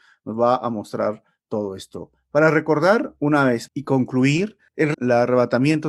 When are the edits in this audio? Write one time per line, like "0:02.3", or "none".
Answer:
0:03.7
0:04.9